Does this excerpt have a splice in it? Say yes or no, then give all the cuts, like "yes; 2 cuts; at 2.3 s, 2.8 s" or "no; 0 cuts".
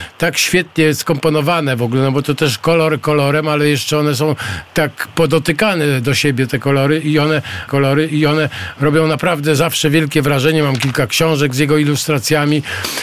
yes; 2 cuts; at 4.7 s, 7.7 s